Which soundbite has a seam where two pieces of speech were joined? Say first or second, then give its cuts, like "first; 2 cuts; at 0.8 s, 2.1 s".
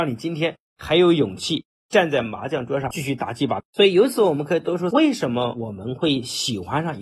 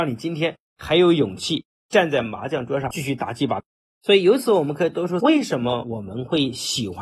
first; 1 cut; at 3.7 s